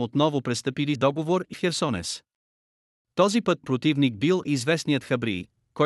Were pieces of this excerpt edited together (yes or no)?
yes